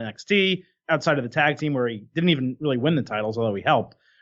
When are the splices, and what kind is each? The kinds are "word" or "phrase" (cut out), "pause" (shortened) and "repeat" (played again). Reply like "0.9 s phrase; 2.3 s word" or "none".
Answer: none